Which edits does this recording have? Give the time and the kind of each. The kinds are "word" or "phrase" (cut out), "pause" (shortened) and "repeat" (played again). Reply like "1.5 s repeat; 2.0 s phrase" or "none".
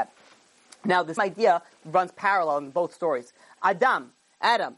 1.2 s word